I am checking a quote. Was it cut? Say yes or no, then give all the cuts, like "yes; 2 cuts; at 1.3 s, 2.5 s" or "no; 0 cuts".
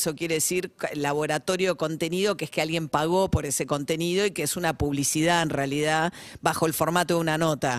no; 0 cuts